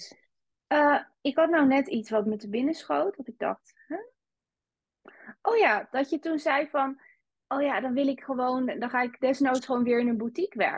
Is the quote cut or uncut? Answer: uncut